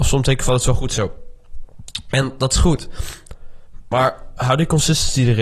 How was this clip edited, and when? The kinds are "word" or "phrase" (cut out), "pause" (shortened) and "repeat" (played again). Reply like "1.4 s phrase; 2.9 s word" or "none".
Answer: none